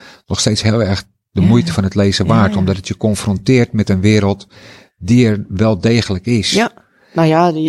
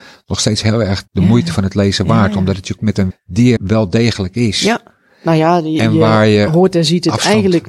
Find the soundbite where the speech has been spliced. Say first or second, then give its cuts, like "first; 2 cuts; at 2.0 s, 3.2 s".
second; 4 cuts; at 1.1 s, 2.8 s, 3.1 s, 3.6 s